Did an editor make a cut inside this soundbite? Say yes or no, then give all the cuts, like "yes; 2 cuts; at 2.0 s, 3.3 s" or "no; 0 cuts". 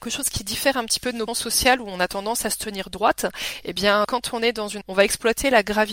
yes; 3 cuts; at 1.3 s, 4.0 s, 4.8 s